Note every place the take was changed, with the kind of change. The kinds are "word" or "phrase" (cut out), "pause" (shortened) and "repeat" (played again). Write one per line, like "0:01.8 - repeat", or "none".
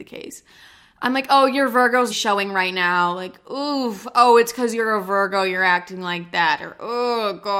0:02.1 - word